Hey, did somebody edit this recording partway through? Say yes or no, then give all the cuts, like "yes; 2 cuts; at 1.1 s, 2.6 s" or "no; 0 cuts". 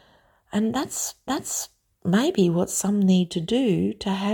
yes; 1 cut; at 1.3 s